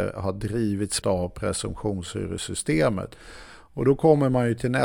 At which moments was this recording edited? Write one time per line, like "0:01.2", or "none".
0:01.0

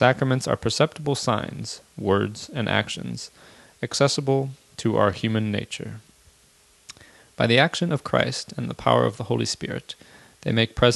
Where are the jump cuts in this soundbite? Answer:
none

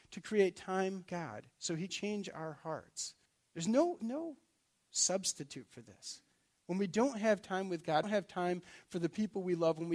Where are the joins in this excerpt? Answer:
0:01.1
0:01.9
0:03.3
0:04.0
0:08.0

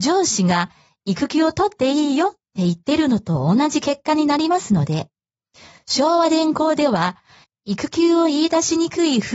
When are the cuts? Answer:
none

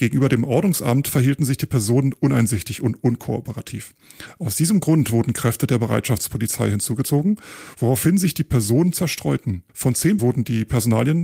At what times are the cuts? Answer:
0:09.7
0:10.2

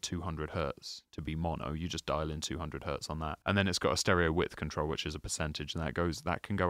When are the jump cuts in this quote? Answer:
0:03.4

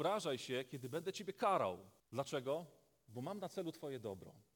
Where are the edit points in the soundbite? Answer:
0:02.0

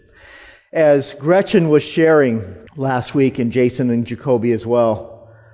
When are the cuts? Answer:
0:02.7

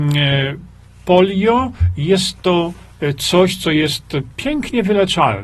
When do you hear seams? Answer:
none

